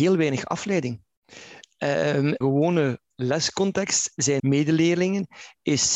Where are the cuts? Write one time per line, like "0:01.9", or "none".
0:02.4
0:04.4